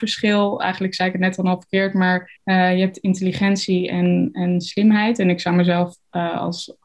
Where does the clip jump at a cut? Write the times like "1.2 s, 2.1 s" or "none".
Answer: 2.4 s